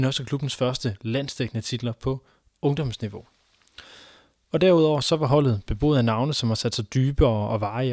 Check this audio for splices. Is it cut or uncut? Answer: uncut